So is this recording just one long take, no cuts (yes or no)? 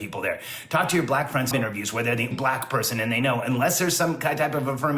no